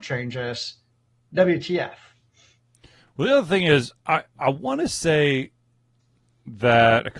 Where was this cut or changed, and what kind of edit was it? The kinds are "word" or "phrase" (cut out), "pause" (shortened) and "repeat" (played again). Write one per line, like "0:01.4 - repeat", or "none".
none